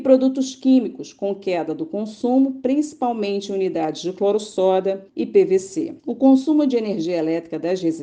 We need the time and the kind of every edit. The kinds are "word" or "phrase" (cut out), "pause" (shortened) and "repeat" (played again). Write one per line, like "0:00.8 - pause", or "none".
0:05.1 - pause
0:06.0 - pause